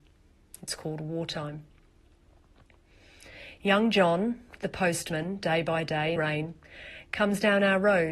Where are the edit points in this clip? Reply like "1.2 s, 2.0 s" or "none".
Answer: 6.2 s